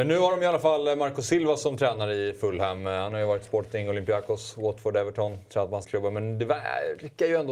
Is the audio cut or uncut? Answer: cut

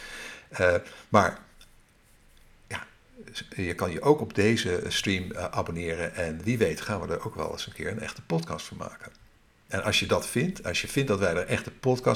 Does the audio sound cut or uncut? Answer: uncut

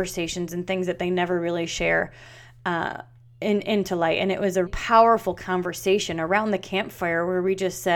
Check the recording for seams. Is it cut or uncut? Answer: cut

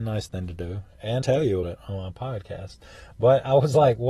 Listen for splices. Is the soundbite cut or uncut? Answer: cut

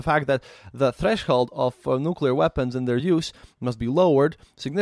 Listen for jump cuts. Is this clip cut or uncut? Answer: uncut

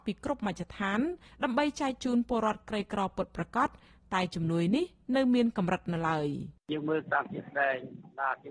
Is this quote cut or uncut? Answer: uncut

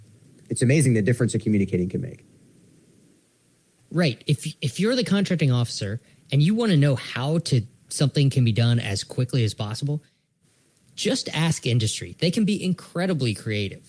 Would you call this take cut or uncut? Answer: uncut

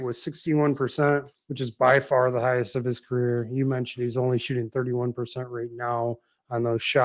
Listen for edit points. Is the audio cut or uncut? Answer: cut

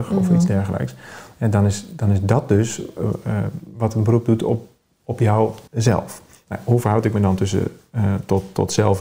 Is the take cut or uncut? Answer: cut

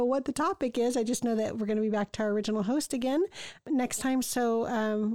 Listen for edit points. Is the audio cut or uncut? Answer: uncut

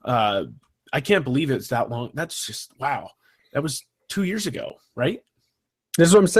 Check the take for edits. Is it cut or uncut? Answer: uncut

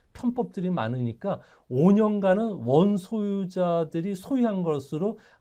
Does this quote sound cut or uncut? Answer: uncut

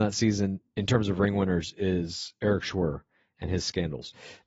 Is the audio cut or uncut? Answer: uncut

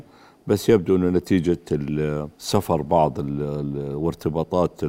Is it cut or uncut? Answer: cut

